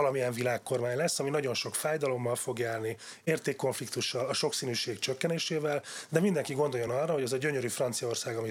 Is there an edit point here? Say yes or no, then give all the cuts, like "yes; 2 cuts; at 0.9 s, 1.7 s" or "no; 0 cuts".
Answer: no; 0 cuts